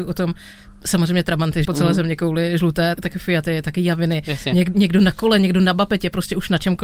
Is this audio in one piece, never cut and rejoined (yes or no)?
no